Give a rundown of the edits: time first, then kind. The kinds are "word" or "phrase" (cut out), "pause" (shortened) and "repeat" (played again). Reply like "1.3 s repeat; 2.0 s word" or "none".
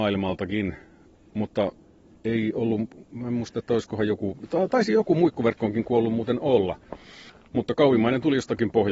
none